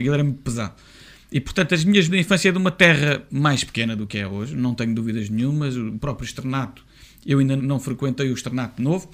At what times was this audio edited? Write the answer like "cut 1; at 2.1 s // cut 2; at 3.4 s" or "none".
cut 1; at 2.1 s // cut 2; at 7.6 s